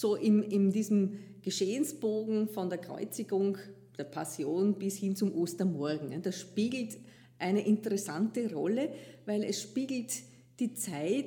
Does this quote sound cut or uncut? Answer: uncut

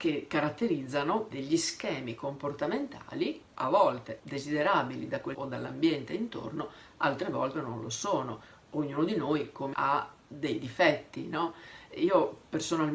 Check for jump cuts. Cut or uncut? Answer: cut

